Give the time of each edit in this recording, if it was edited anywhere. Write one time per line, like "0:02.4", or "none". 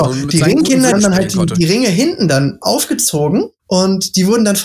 0:00.9
0:03.6